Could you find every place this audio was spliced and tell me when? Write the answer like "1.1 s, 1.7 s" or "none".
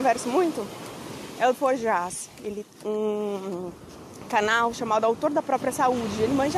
1.5 s, 2.7 s